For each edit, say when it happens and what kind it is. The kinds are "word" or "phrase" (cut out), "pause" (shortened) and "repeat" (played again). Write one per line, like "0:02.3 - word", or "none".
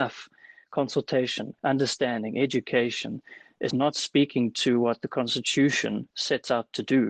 0:01.6 - pause
0:03.7 - word
0:06.1 - pause